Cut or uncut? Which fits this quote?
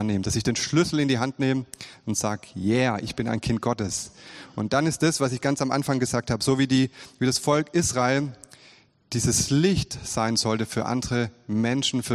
uncut